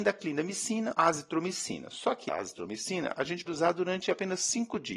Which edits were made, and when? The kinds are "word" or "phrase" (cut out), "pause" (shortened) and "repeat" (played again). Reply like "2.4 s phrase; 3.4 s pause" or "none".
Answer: 0.9 s word; 2.3 s word; 3.5 s word